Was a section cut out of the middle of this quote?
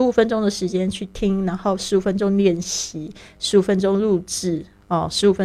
no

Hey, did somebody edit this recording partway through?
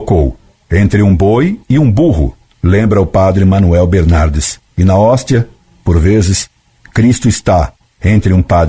no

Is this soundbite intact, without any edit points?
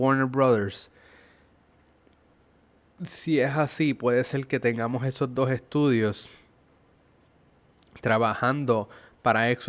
yes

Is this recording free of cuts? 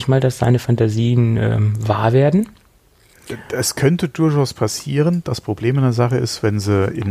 yes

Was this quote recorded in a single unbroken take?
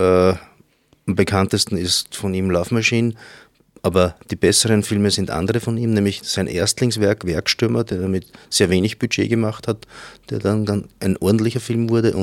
yes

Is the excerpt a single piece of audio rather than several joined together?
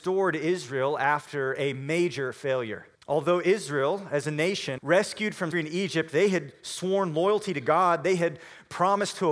no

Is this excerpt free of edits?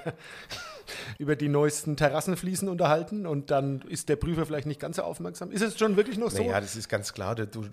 yes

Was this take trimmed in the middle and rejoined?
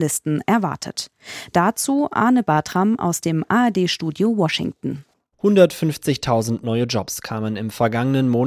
no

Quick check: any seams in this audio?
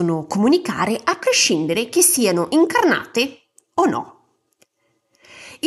no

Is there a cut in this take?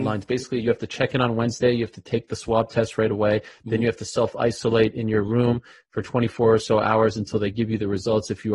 no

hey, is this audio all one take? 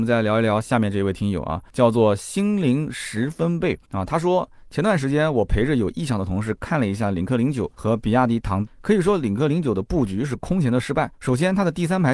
no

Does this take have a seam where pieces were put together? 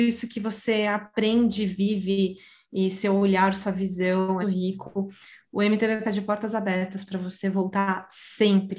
yes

